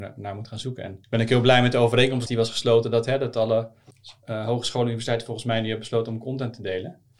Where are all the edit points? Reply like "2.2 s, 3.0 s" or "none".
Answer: 1.0 s, 2.3 s

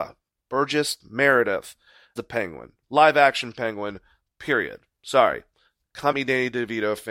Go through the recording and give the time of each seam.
2.2 s, 2.8 s, 6.1 s

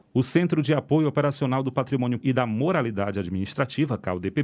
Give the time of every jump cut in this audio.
2.2 s

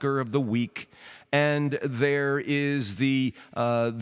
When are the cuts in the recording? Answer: none

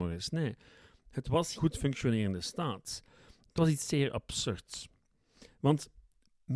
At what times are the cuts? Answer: 1.6 s

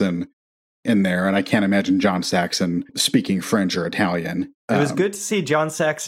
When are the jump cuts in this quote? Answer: 2.9 s, 4.6 s

